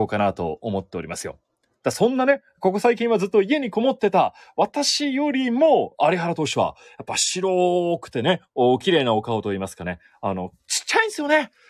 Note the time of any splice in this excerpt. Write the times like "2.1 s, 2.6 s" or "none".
none